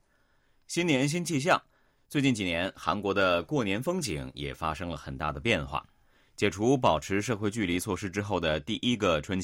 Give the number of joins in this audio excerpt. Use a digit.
0